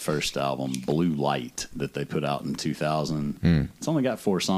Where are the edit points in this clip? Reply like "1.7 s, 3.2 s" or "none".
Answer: none